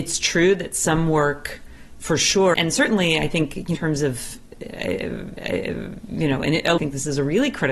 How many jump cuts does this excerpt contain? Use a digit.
4